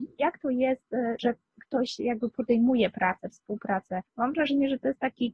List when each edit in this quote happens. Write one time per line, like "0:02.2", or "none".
0:01.2
0:03.3
0:04.1

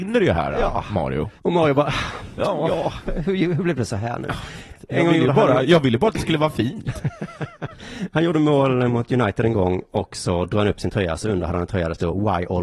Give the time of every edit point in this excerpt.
0:01.4

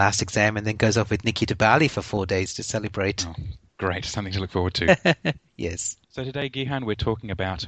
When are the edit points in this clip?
0:06.0

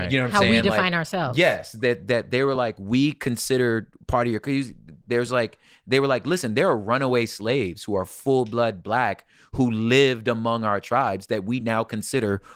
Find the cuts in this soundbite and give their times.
none

